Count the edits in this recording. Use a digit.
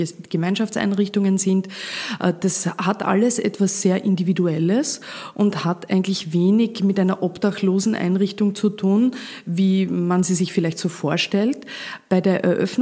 0